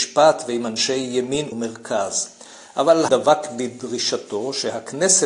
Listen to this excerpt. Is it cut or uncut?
cut